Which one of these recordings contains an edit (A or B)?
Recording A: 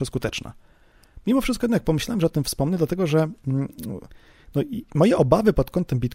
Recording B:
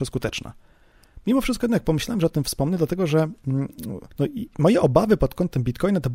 B